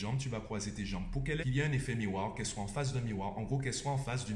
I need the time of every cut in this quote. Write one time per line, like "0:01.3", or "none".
0:01.4